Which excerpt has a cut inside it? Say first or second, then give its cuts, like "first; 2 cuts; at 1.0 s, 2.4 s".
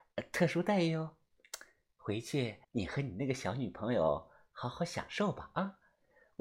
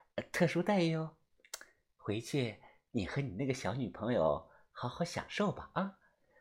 first; 1 cut; at 2.6 s